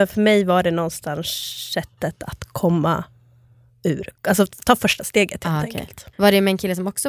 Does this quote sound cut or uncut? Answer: cut